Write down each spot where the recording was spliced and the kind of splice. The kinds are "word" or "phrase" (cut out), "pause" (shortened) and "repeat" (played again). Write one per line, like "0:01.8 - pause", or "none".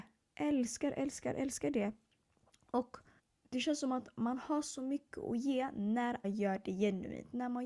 0:03.2 - pause
0:06.2 - word